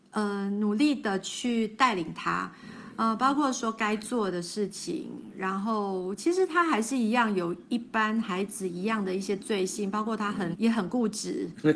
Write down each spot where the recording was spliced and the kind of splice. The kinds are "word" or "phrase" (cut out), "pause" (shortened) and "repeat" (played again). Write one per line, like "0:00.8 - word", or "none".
0:10.5 - word